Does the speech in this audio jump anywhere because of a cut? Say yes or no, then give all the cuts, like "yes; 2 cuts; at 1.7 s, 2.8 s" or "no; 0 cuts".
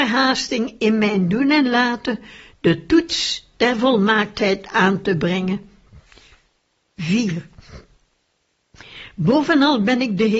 no; 0 cuts